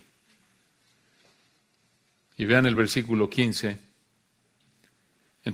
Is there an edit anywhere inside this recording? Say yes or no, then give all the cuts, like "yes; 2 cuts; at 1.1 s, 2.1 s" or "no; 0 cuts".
no; 0 cuts